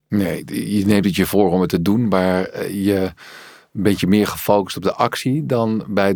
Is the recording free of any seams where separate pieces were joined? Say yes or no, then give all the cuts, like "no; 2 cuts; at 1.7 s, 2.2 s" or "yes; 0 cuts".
yes; 0 cuts